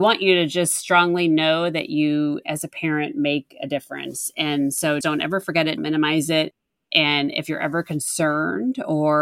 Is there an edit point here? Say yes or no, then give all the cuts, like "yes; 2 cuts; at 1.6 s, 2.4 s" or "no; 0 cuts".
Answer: yes; 2 cuts; at 5.0 s, 5.8 s